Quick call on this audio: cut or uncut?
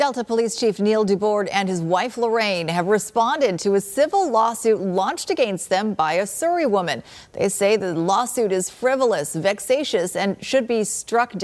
uncut